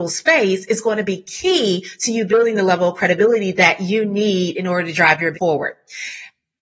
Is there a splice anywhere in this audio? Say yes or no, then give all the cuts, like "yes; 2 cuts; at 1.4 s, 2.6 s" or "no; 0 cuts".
yes; 1 cut; at 5.3 s